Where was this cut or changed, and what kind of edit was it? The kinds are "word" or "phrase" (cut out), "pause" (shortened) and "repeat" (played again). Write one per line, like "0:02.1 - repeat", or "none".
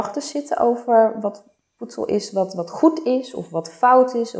none